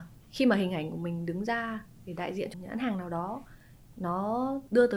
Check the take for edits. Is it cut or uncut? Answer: cut